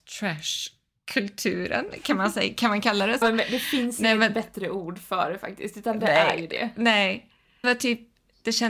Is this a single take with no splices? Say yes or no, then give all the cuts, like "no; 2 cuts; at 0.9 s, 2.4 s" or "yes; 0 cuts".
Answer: no; 2 cuts; at 3.2 s, 7.6 s